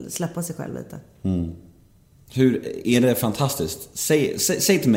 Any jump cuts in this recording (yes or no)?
no